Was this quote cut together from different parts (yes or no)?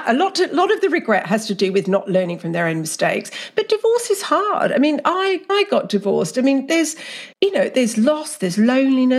yes